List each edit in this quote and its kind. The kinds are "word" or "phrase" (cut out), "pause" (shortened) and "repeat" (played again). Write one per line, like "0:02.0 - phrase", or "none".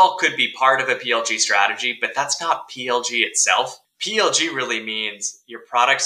0:03.8 - pause